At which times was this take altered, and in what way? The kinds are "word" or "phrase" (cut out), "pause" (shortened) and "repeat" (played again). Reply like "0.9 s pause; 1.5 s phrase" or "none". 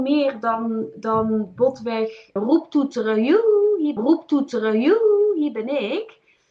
2.4 s word; 4.0 s repeat